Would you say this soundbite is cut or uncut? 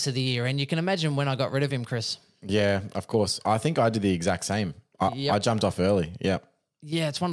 uncut